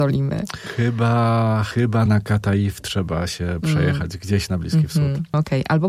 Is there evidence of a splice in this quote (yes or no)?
no